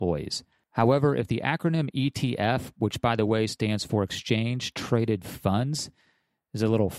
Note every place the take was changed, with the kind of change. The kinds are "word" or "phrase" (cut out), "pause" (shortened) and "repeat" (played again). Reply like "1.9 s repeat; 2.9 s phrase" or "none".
none